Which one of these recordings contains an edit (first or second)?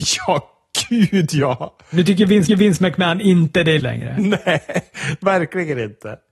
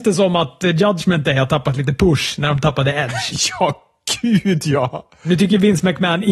first